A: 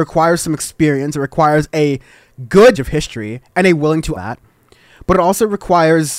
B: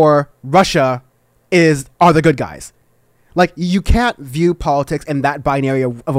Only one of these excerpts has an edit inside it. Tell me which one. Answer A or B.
A